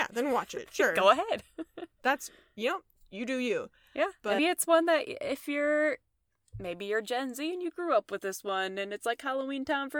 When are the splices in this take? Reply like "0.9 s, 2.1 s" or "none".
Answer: 4.4 s